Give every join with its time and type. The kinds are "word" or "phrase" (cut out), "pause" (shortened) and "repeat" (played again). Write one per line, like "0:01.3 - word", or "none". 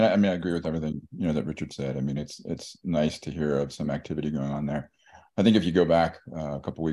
none

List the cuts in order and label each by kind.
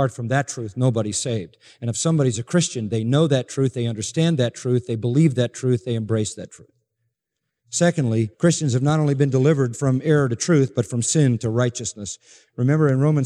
0:08.3 - pause

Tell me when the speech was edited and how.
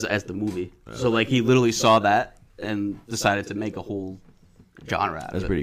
none

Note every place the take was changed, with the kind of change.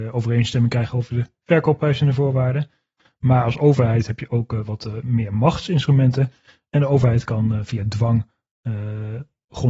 none

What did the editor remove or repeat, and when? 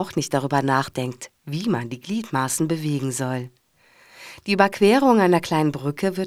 none

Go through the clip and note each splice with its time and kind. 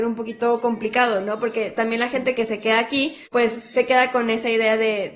0:02.4 - word
0:03.3 - pause

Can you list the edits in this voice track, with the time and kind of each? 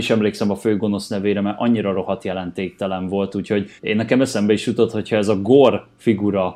0:03.8 - pause

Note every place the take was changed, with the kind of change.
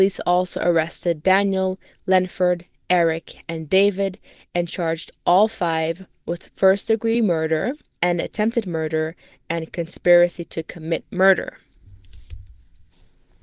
none

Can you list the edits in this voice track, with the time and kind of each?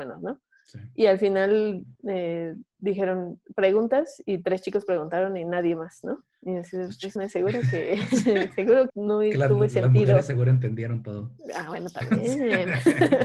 0:06.3 - pause
0:07.2 - word
0:08.9 - phrase

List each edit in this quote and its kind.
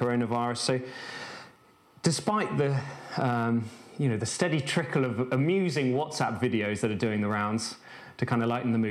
none

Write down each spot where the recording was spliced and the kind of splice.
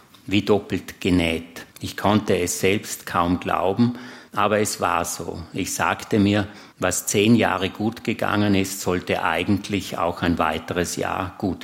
0:01.7 - pause
0:04.3 - pause
0:06.7 - pause

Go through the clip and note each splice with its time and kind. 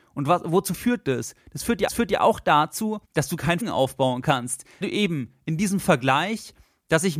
0:01.9 - repeat
0:03.0 - pause
0:03.6 - word
0:04.8 - word

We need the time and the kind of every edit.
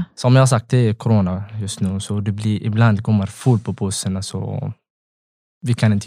none

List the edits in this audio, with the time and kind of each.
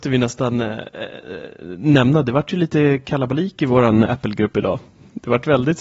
0:04.0 - word

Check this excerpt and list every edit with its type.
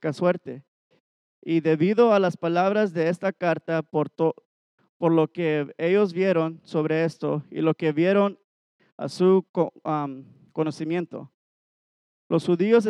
none

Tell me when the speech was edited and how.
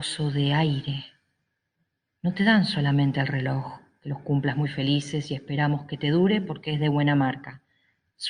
none

